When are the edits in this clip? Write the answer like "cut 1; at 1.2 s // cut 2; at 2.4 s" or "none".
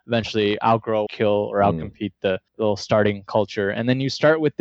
cut 1; at 1.1 s // cut 2; at 2.5 s

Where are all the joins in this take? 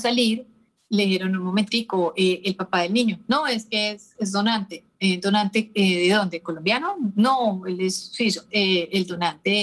cut 1; at 8.5 s

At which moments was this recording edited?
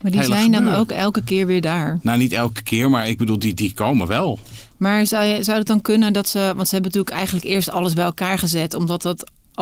none

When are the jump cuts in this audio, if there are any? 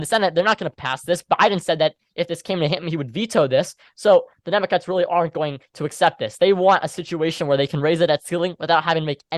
none

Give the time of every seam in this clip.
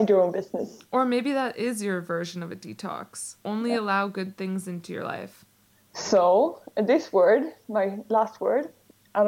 cut 1; at 3.4 s

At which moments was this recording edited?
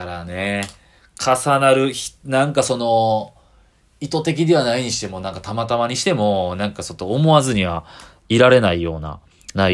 none

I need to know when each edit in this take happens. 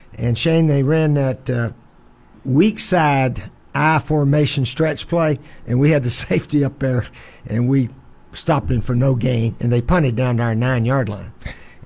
none

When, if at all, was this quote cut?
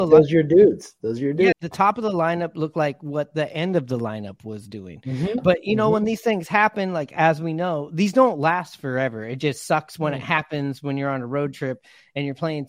cut 1; at 1.5 s

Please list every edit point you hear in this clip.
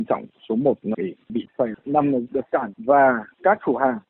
cut 1; at 0.9 s // cut 2; at 1.5 s // cut 3; at 2.3 s // cut 4; at 2.7 s

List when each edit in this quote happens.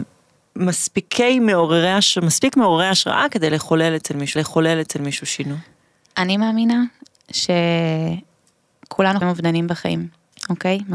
cut 1; at 4.4 s // cut 2; at 9.2 s

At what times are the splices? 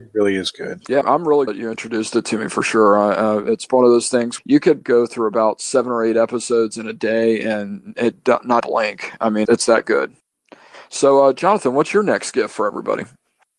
cut 1; at 1.0 s // cut 2; at 1.5 s // cut 3; at 4.4 s // cut 4; at 4.8 s // cut 5; at 8.6 s // cut 6; at 9.4 s

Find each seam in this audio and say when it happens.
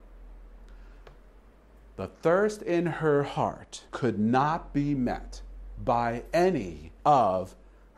cut 1; at 3.9 s // cut 2; at 7.0 s

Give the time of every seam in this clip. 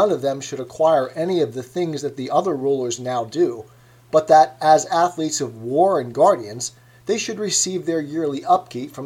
none

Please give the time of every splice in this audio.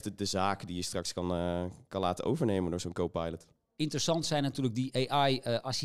none

